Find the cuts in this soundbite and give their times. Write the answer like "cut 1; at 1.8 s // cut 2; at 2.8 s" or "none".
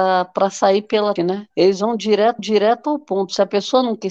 cut 1; at 1.2 s // cut 2; at 1.5 s // cut 3; at 2.4 s